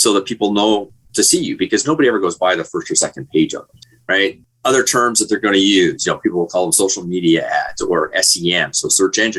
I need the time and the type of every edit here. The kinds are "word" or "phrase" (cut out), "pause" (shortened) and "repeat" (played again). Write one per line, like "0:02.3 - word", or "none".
none